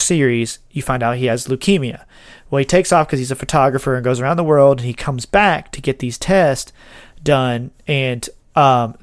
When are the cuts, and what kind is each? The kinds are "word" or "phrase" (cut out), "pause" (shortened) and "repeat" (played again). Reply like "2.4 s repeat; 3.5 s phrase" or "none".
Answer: none